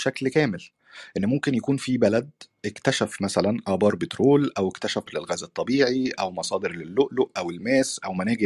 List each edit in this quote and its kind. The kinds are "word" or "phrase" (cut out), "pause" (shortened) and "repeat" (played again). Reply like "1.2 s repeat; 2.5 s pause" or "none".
5.1 s word